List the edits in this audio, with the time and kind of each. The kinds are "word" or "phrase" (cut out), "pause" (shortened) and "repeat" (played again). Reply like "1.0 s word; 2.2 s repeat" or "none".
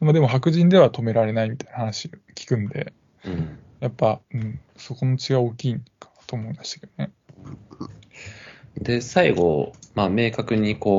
2.2 s pause; 4.2 s pause